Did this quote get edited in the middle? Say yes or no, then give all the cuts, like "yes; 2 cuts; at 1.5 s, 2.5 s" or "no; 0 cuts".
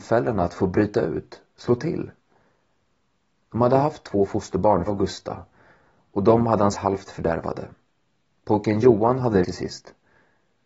yes; 3 cuts; at 4.9 s, 6.7 s, 9.4 s